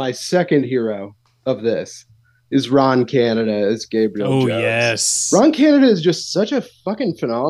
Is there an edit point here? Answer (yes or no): no